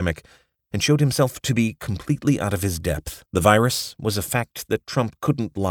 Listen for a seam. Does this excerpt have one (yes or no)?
yes